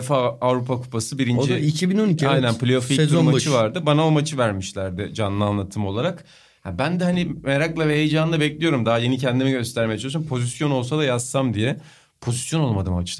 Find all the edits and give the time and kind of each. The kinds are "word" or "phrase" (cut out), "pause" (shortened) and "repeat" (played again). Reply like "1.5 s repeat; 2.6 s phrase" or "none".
none